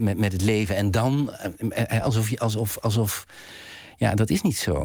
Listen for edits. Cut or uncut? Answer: uncut